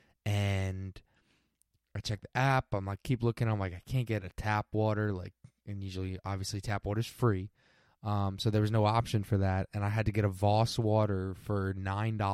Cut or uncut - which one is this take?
uncut